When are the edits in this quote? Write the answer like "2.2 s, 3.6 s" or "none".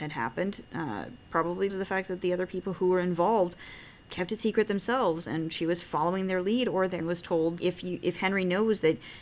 1.7 s, 4.0 s, 7.0 s, 7.6 s